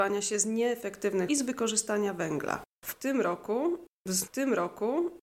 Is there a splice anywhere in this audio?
yes; 2 cuts; at 1.3 s, 4.3 s

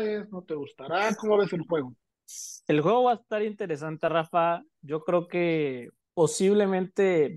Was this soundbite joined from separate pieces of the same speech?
no; 0 cuts

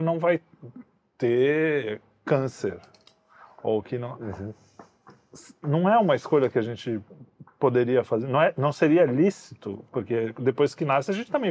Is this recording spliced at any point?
no; 0 cuts

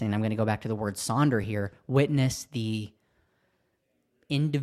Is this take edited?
no; 0 cuts

